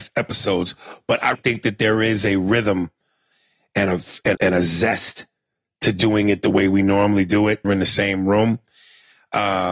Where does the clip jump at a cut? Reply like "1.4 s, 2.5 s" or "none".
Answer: 1.3 s, 4.3 s, 7.6 s